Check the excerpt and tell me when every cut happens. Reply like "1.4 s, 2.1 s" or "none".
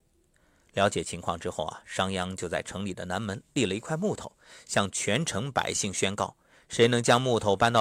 none